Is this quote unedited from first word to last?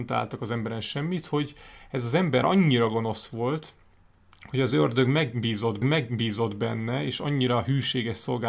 no; 2 cuts; at 2.4 s, 5.8 s

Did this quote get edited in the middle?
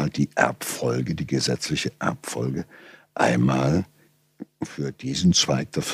no; 0 cuts

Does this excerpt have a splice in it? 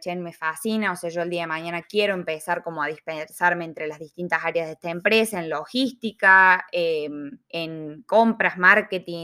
yes; 1 cut; at 7.4 s

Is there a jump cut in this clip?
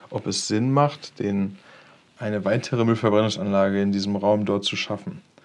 no; 0 cuts

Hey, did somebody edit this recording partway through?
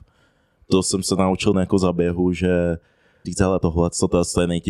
yes; 3 cuts; at 1.5 s, 3.2 s, 3.6 s

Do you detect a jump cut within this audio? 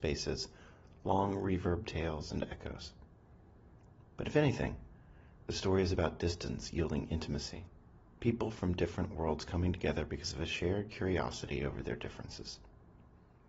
no; 0 cuts

